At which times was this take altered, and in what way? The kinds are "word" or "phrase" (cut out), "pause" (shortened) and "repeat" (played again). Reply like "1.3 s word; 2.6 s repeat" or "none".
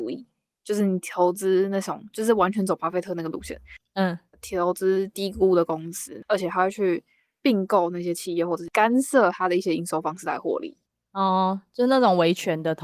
none